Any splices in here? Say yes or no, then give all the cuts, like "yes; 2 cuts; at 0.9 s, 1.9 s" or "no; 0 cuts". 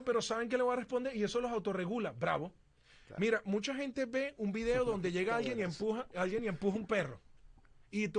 no; 0 cuts